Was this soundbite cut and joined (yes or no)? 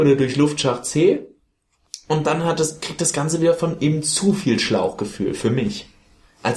no